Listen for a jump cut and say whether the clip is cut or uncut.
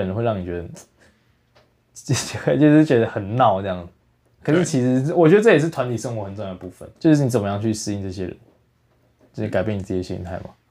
cut